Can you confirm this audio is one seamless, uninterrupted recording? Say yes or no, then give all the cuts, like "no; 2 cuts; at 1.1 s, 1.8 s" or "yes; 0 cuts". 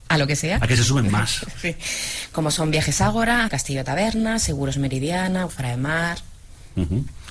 no; 2 cuts; at 3.5 s, 5.5 s